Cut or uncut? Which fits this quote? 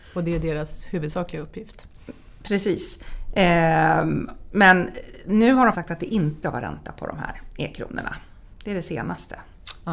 cut